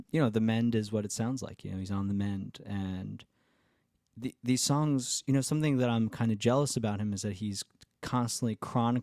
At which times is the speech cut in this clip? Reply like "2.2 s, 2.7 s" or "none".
none